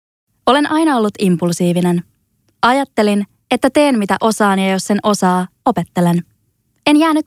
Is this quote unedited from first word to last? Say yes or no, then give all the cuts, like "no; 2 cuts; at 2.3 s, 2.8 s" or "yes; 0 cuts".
yes; 0 cuts